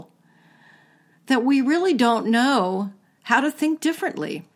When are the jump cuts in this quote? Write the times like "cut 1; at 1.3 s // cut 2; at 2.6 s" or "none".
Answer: none